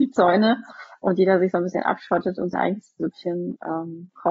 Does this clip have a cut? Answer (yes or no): yes